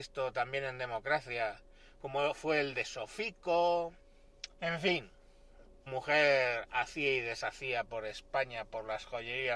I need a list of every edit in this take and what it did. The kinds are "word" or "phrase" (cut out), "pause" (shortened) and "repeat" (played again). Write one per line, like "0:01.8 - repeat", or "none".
0:04.5 - pause
0:05.9 - word